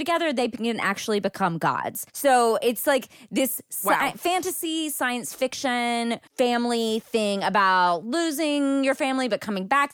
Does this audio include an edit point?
yes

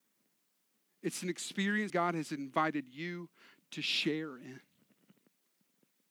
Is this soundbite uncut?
no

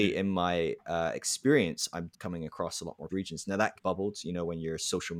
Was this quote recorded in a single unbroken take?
no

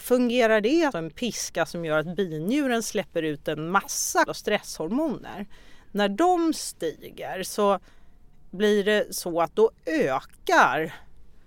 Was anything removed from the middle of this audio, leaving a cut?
yes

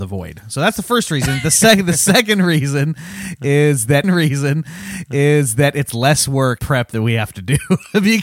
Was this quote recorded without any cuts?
no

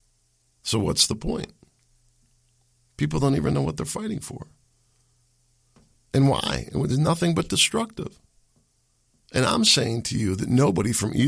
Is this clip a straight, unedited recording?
yes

